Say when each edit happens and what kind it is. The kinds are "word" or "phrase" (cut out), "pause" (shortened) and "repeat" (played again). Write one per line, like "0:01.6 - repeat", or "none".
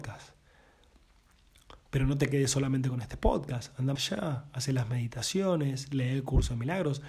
0:04.0 - word